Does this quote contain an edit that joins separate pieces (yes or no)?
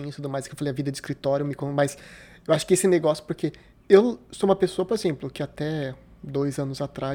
no